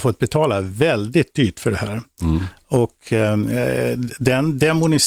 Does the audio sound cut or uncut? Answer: uncut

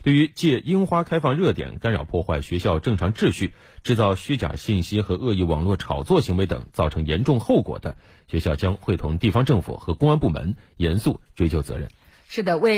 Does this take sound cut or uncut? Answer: uncut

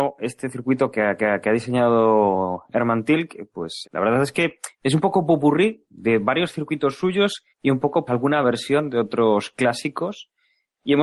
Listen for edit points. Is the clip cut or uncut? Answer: cut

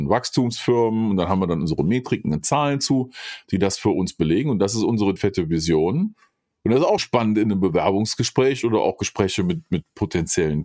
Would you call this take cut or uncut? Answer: cut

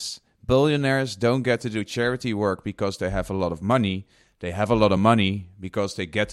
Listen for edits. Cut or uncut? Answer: uncut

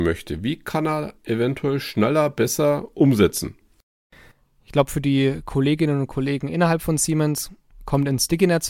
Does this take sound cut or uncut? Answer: uncut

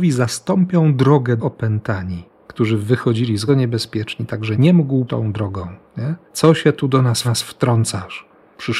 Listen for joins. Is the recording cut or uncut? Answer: cut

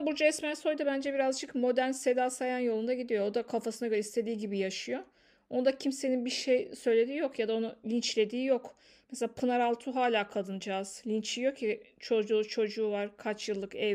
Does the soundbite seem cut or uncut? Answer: uncut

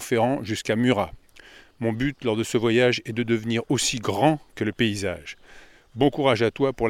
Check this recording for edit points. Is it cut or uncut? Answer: uncut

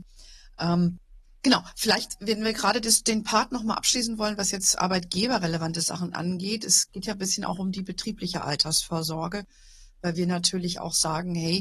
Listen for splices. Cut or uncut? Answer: uncut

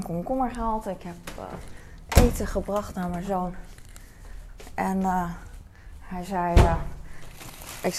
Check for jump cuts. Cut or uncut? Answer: uncut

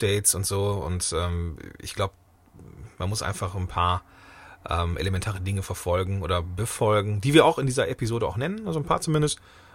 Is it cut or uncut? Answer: uncut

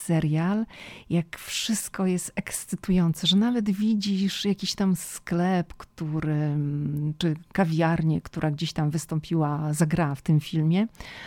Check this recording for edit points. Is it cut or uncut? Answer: uncut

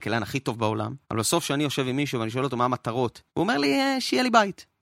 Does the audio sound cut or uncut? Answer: cut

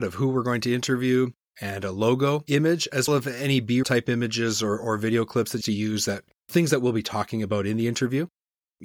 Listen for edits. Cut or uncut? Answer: cut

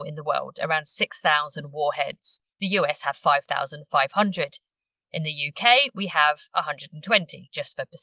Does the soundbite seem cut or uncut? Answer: uncut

